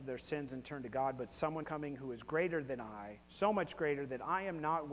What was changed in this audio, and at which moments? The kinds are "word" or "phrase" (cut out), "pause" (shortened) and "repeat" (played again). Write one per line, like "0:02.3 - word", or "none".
0:01.6 - word
0:03.2 - pause